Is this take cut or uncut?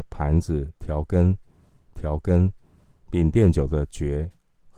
cut